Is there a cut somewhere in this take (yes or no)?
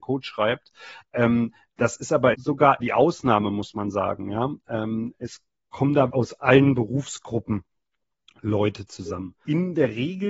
yes